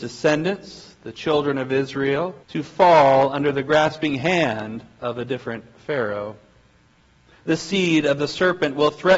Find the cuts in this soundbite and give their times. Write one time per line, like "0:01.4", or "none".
0:02.4